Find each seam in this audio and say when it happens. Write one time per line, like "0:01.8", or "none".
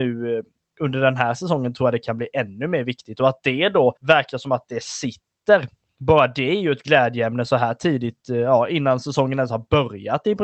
0:04.0